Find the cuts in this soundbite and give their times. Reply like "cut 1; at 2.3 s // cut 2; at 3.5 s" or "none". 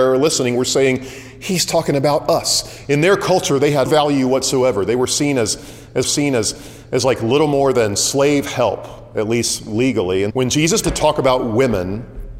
cut 1; at 3.9 s // cut 2; at 6.0 s // cut 3; at 10.3 s // cut 4; at 10.8 s